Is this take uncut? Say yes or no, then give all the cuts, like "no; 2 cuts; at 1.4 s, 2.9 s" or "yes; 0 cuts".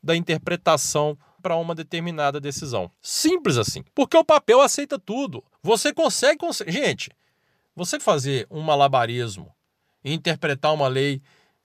no; 6 cuts; at 1.4 s, 2.9 s, 3.9 s, 5.5 s, 6.4 s, 8.0 s